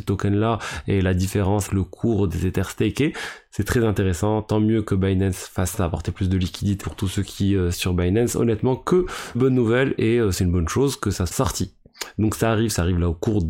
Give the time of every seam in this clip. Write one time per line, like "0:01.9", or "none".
0:01.7
0:05.7
0:06.8
0:07.7
0:09.3
0:11.3